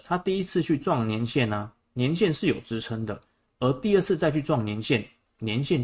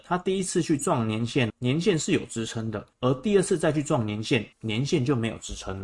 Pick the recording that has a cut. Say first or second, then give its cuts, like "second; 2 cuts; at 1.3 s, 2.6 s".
second; 3 cuts; at 1.5 s, 2.9 s, 4.5 s